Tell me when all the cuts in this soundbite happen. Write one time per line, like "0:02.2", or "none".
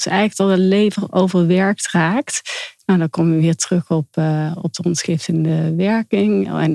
none